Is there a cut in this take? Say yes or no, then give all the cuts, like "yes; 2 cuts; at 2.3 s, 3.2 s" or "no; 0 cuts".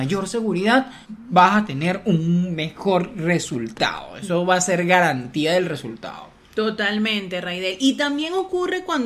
yes; 1 cut; at 1.0 s